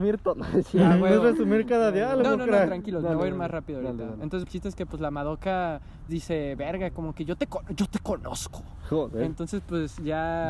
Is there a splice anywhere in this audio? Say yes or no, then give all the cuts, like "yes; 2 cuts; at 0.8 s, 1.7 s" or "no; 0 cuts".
yes; 2 cuts; at 4.4 s, 6.1 s